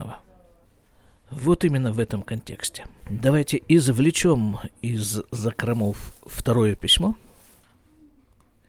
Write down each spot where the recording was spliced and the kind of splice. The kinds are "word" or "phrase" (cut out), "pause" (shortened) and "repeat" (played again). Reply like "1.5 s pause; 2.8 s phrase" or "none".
3.0 s pause